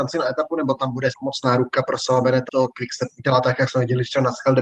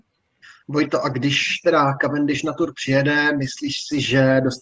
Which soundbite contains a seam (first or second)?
first